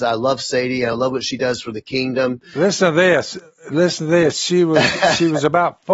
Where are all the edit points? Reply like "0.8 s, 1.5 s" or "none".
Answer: none